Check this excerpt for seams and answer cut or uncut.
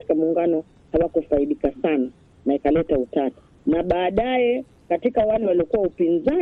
uncut